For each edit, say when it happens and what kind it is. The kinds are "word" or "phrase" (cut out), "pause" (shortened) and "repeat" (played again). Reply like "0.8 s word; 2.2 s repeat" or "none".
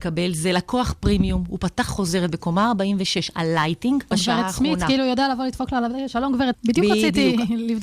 1.9 s word; 4.1 s word; 6.5 s word